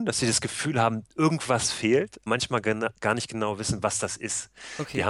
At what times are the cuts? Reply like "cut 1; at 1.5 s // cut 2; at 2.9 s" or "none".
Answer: cut 1; at 1.1 s // cut 2; at 2.3 s

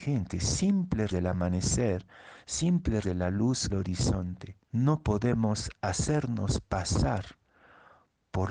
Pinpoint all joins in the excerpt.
cut 1; at 1.1 s // cut 2; at 3.0 s // cut 3; at 3.7 s // cut 4; at 4.6 s

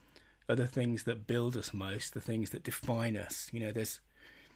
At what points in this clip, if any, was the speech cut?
none

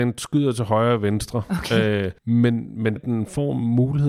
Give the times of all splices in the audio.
cut 1; at 2.2 s // cut 2; at 3.0 s

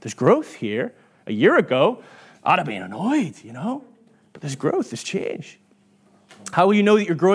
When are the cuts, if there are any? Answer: none

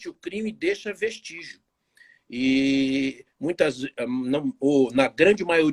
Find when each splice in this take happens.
none

